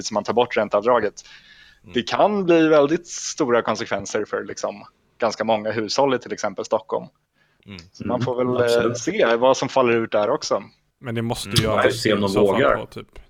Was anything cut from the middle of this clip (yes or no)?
no